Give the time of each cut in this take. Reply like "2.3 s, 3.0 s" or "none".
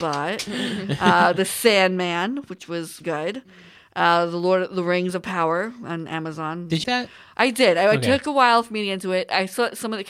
3.0 s, 6.8 s